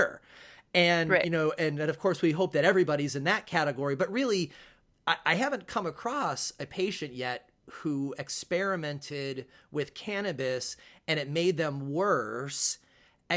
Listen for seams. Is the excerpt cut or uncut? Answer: uncut